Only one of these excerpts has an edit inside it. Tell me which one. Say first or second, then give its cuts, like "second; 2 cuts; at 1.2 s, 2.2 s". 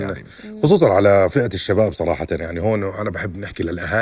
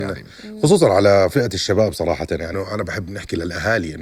second; 1 cut; at 2.5 s